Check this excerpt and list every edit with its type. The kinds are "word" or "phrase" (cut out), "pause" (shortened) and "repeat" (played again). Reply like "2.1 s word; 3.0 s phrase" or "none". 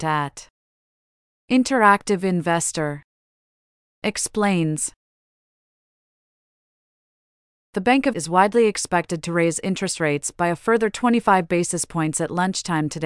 8.1 s word